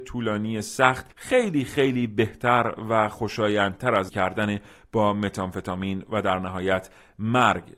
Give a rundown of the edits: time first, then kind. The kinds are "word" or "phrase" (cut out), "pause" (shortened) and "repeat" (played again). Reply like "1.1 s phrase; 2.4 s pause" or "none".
1.1 s pause; 4.1 s word